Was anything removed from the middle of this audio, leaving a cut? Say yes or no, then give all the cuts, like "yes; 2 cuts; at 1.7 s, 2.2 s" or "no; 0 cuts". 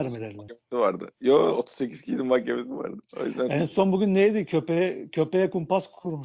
yes; 1 cut; at 3.1 s